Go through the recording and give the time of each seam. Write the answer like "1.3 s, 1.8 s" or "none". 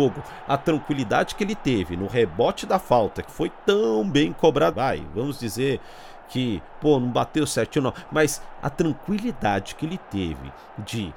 3.3 s, 4.7 s